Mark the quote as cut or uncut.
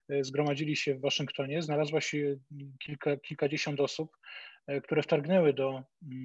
uncut